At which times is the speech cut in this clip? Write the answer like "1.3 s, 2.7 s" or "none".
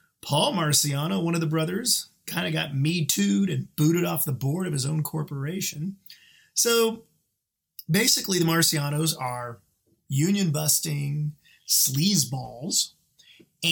none